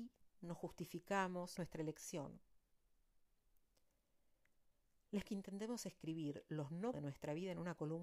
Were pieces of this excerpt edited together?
yes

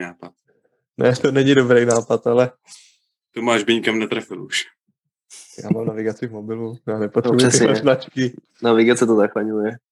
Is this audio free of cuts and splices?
yes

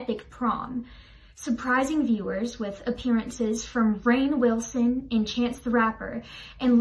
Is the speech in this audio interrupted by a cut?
no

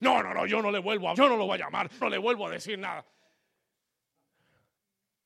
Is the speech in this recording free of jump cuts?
no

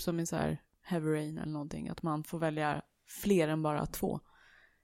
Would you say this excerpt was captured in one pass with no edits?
yes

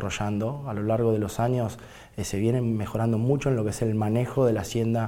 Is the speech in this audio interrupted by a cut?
no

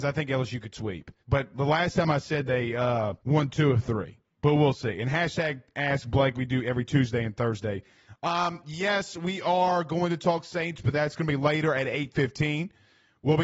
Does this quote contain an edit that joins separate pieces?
yes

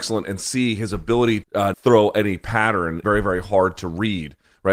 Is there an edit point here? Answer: yes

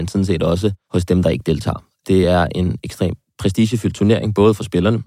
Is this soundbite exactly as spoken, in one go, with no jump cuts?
yes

